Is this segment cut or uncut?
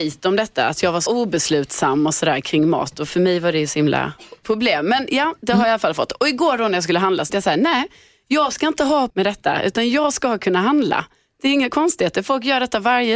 cut